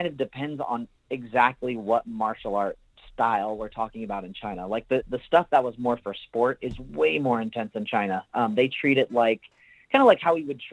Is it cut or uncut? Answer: uncut